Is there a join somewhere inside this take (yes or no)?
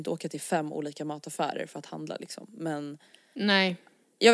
no